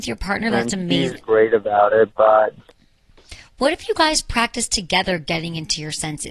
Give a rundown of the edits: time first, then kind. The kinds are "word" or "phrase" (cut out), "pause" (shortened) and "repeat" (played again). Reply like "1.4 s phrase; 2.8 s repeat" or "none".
none